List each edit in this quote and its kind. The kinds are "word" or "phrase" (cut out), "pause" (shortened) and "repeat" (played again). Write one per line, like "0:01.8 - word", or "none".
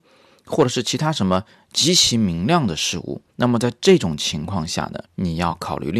0:01.5 - pause
0:03.3 - pause
0:05.1 - pause